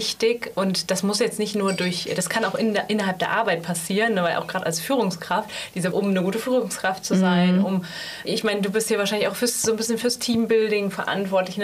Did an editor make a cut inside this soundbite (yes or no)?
yes